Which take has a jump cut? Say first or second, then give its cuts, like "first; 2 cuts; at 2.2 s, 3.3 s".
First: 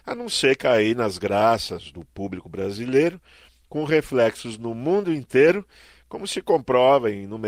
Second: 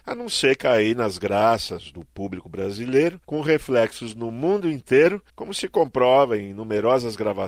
second; 2 cuts; at 3.2 s, 5.3 s